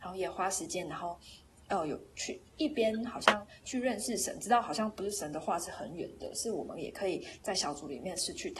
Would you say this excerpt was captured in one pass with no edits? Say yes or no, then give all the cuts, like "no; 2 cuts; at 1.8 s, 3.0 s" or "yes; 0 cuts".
yes; 0 cuts